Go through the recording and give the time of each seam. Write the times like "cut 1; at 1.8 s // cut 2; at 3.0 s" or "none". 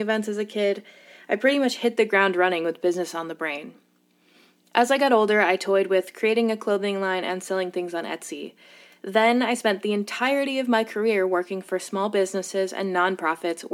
none